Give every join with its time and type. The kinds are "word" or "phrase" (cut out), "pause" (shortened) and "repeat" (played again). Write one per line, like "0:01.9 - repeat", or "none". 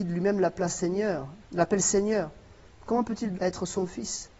0:01.4 - pause
0:03.3 - word